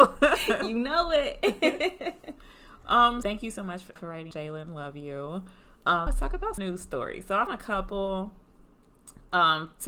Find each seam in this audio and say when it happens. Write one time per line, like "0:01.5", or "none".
0:03.2
0:04.0
0:04.3
0:06.1
0:06.6
0:07.5